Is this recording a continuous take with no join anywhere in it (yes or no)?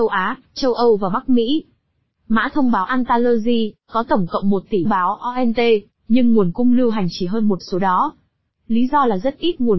no